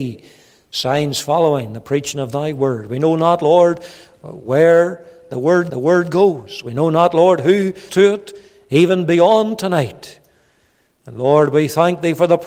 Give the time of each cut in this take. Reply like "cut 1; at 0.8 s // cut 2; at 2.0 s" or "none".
cut 1; at 5.7 s // cut 2; at 7.9 s